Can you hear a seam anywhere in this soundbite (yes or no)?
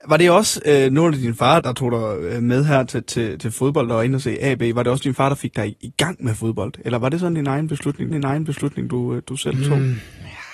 yes